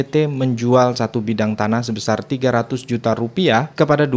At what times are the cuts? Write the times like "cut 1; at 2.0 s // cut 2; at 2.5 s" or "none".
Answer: none